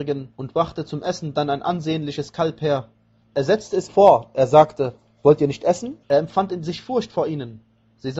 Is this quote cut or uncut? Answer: cut